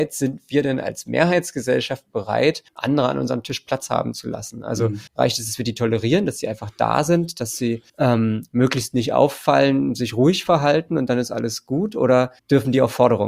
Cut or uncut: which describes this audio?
cut